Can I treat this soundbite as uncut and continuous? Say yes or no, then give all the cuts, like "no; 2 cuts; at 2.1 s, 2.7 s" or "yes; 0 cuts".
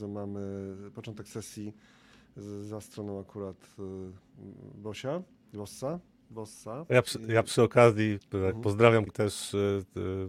no; 1 cut; at 9.1 s